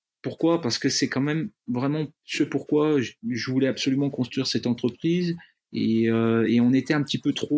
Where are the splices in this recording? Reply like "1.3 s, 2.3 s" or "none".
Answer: 3.2 s

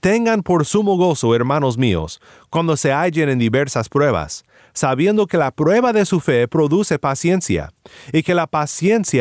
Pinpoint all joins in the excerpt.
none

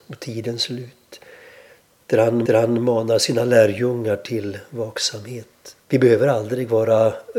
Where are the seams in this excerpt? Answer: 2.5 s, 5.8 s

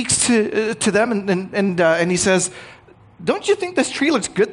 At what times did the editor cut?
none

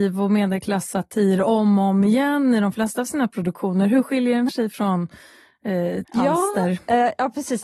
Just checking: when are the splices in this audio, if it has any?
4.5 s, 6.0 s

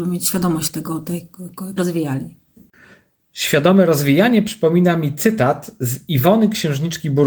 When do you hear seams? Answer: 1.8 s

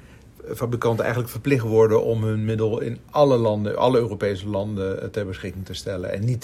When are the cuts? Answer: none

